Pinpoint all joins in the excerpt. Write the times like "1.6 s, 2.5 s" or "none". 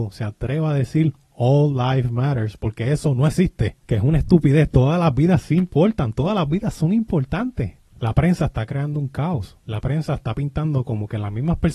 9.6 s